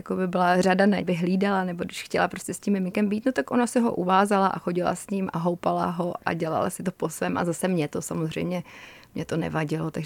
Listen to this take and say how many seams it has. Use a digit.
1